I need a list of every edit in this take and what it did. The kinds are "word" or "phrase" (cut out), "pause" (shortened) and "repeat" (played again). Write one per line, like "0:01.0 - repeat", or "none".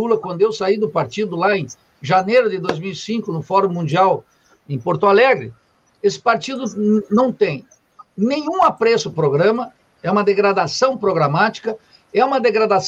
0:09.1 - word